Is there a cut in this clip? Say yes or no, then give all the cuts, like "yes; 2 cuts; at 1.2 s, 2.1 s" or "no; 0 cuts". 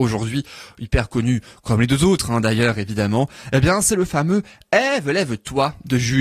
no; 0 cuts